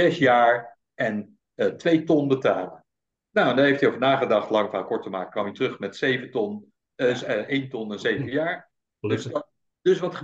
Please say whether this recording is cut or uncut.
uncut